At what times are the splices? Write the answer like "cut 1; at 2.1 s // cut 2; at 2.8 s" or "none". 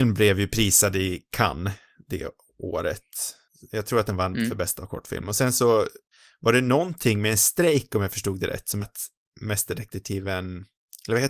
cut 1; at 8.8 s